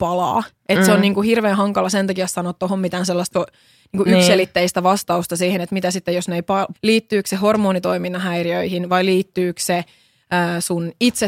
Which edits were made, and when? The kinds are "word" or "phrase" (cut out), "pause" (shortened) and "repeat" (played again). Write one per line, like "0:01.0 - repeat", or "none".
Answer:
0:03.3 - word
0:06.7 - word